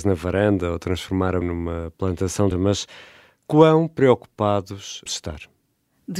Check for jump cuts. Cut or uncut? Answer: cut